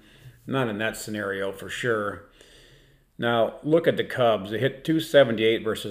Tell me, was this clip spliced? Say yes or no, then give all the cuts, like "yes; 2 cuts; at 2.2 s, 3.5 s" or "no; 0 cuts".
no; 0 cuts